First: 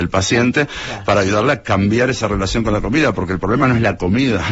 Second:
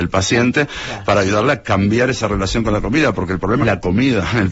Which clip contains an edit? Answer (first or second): second